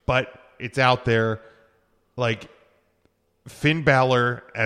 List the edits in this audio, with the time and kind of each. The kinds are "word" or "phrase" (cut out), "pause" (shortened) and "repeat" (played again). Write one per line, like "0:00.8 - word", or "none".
none